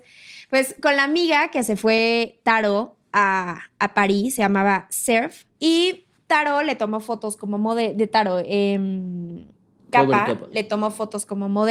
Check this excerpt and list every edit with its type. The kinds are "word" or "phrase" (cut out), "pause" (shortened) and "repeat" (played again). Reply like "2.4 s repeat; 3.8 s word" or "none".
5.5 s pause